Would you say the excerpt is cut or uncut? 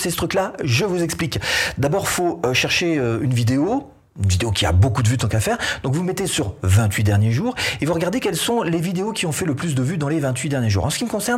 uncut